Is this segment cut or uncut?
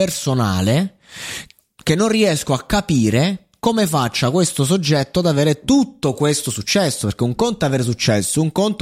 uncut